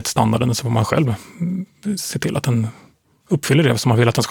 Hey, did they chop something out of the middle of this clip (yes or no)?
no